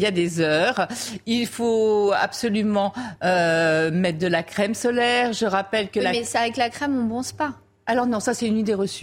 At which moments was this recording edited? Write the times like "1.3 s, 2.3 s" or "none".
none